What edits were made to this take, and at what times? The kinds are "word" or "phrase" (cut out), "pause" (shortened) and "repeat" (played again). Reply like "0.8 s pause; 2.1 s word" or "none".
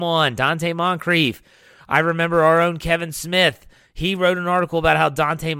none